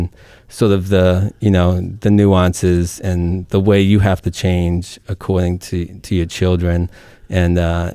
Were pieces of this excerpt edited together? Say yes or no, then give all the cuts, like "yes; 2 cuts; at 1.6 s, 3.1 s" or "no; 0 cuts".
no; 0 cuts